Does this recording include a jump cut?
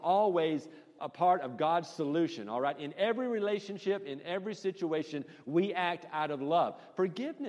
yes; 1 cut; at 1.0 s

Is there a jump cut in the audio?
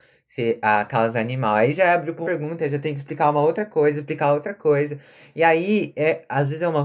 yes; 1 cut; at 2.2 s

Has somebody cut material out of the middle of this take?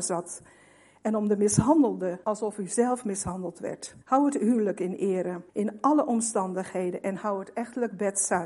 yes; 3 cuts; at 2.2 s, 4.0 s, 5.5 s

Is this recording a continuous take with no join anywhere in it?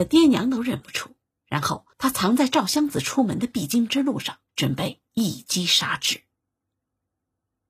no; 3 cuts; at 1.3 s, 1.9 s, 4.5 s

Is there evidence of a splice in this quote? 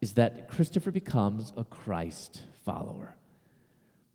no; 0 cuts

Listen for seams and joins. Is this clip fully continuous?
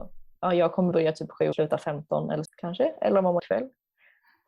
no; 4 cuts; at 0.9 s, 1.5 s, 2.4 s, 3.4 s

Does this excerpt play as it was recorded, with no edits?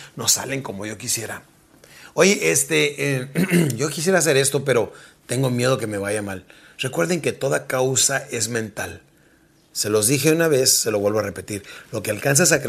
yes; 0 cuts

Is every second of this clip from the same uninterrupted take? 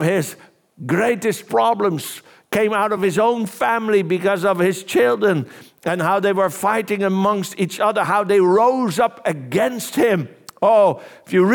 yes; 0 cuts

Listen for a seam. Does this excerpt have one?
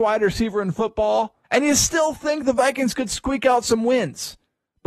yes; 1 cut; at 1.4 s

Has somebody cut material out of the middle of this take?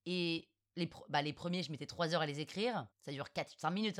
yes; 1 cut; at 2.9 s

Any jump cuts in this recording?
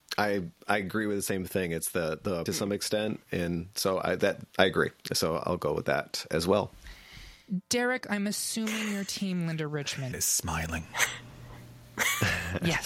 yes; 4 cuts; at 2.5 s, 4.5 s, 5.0 s, 10.1 s

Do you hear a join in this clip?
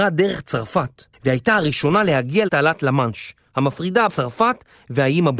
yes; 3 cuts; at 1.1 s, 2.5 s, 4.1 s

